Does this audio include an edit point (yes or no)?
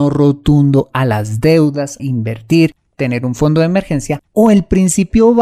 yes